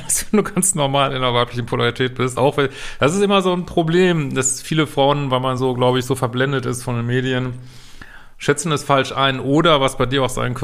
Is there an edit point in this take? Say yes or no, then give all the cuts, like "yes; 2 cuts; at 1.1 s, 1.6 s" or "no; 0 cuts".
no; 0 cuts